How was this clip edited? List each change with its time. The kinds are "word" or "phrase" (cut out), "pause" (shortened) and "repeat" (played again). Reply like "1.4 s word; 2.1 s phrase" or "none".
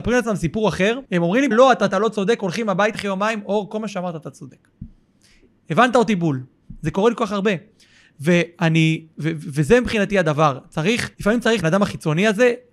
1.0 s pause; 1.5 s word; 1.9 s phrase; 2.9 s word; 11.1 s pause; 11.6 s phrase